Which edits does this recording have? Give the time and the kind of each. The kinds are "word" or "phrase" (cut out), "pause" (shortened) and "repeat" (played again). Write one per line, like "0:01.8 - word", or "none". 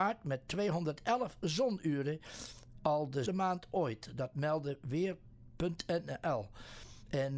0:03.3 - word

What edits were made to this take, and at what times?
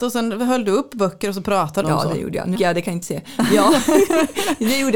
0:01.8 - word
0:02.5 - word
0:03.0 - word

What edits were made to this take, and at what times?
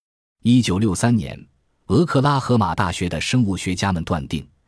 none

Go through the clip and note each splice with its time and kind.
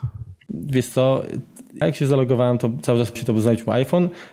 0:01.8 - word
0:03.2 - word

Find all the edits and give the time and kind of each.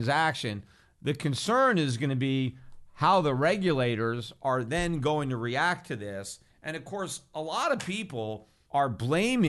none

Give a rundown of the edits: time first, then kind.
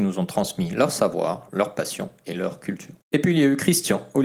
0:03.0 - pause

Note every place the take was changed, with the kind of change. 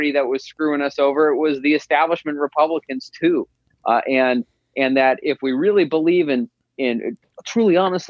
0:05.2 - word

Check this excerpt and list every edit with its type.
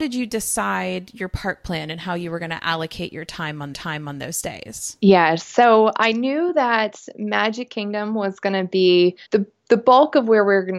0:03.7 - repeat
0:09.2 - pause

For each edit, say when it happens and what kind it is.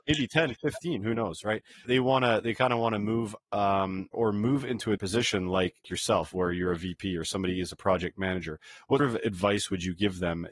0:01.8 - word
0:03.4 - word
0:04.1 - word
0:05.0 - word
0:05.8 - word
0:09.0 - word

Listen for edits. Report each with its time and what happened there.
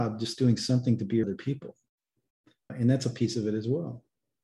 0:01.2 - word
0:02.7 - word

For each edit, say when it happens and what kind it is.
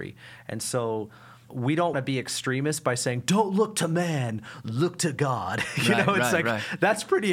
0:01.5 - word
0:01.9 - word

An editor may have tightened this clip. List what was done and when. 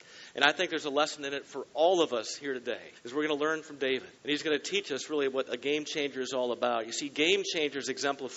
0:02.9 - pause
0:04.2 - pause

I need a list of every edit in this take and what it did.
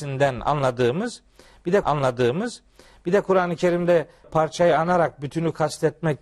0:01.8 - repeat
0:04.2 - word

